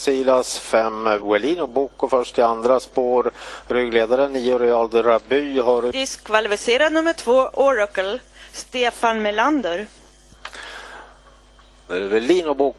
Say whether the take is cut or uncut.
uncut